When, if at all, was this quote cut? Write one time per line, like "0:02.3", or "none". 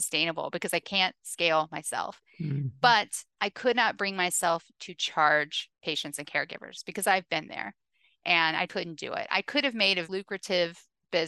0:05.8
0:08.7
0:10.1